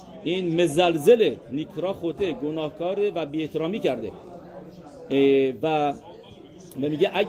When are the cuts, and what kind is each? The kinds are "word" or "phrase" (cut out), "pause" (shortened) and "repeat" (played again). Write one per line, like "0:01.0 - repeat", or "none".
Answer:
none